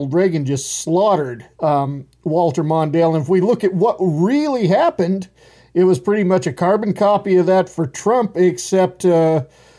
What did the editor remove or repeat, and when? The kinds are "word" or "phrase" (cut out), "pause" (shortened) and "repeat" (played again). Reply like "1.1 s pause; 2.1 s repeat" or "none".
1.5 s pause